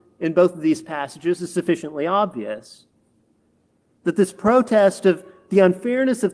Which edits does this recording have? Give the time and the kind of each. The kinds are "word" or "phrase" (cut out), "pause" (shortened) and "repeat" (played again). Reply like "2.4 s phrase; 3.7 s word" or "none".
none